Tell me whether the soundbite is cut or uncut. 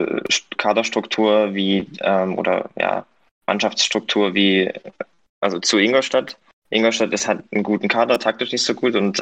uncut